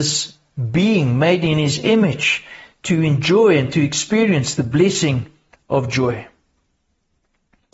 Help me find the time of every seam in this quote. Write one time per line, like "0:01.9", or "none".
none